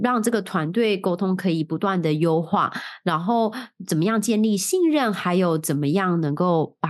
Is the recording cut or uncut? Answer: uncut